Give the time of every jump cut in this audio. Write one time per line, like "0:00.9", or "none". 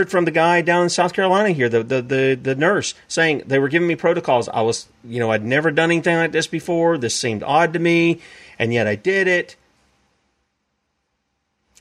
none

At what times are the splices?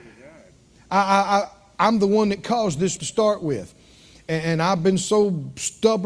0:03.0

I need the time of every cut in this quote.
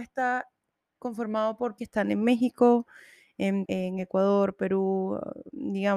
0:01.8
0:03.7

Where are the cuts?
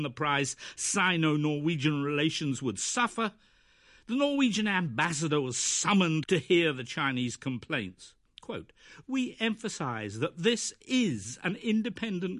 0:06.2
0:08.3

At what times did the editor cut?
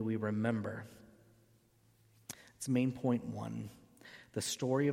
none

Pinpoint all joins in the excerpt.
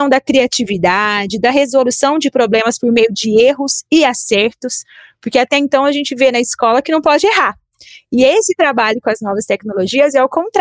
none

